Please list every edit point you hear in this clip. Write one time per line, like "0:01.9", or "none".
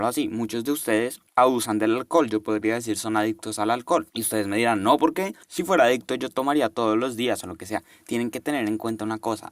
0:01.3
0:04.1
0:05.4